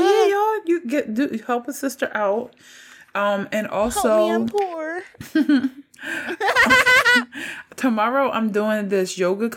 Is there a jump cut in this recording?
no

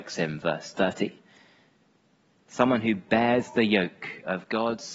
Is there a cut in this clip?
no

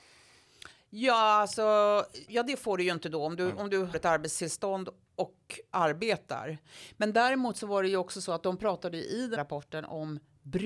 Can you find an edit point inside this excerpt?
yes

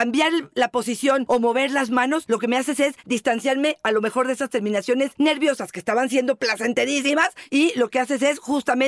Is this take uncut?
yes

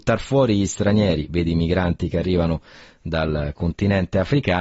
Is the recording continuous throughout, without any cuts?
yes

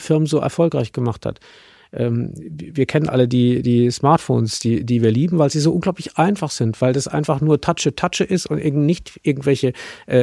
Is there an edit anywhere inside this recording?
no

